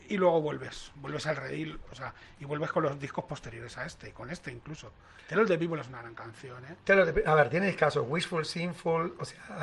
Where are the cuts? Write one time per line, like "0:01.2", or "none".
none